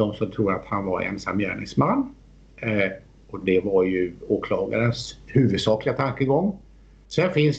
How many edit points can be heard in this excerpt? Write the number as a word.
zero